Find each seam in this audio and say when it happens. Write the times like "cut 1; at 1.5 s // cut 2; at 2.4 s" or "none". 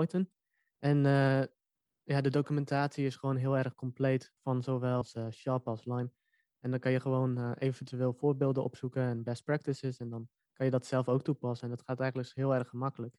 cut 1; at 4.4 s